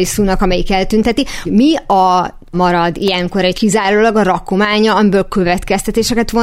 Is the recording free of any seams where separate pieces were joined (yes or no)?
no